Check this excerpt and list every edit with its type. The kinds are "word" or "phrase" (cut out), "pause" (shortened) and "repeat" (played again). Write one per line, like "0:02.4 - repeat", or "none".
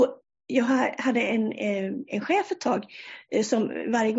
none